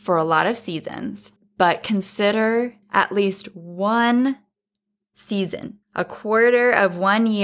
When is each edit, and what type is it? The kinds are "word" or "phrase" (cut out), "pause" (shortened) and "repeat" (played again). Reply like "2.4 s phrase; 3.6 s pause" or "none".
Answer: 1.4 s pause; 2.8 s pause; 5.8 s pause